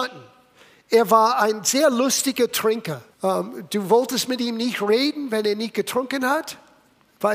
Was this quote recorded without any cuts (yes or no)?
no